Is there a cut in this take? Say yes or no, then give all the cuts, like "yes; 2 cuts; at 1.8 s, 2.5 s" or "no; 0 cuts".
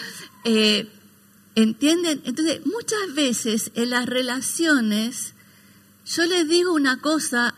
no; 0 cuts